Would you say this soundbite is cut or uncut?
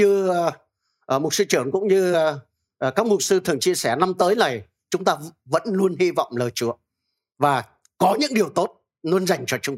uncut